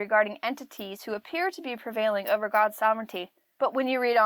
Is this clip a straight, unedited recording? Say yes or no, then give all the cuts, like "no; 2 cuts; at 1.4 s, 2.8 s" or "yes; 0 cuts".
yes; 0 cuts